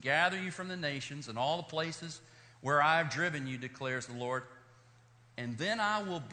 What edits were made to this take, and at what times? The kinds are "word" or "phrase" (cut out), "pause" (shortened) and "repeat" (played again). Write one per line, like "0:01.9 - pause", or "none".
none